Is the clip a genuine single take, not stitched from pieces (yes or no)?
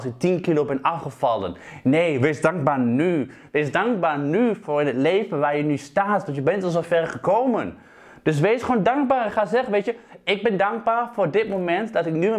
yes